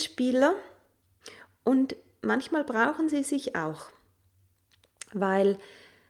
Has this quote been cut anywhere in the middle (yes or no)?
no